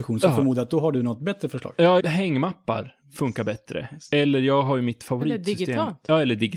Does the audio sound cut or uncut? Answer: cut